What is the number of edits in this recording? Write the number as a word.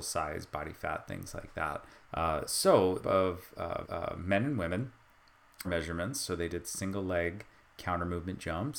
four